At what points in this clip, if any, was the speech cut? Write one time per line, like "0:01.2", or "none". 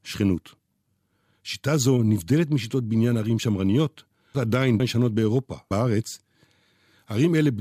0:04.3
0:04.8
0:05.7